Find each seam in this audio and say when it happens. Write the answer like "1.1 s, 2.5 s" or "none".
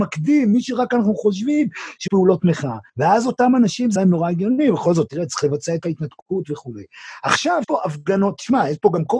2.1 s, 2.9 s, 4.0 s, 5.8 s, 7.6 s